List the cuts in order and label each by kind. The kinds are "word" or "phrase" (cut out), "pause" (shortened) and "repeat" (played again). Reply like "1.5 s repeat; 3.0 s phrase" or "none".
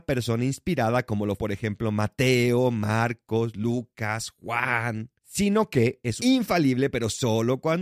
1.4 s word; 5.2 s pause; 6.2 s phrase